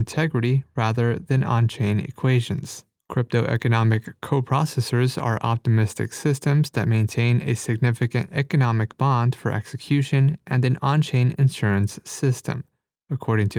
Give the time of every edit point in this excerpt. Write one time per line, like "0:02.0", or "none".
none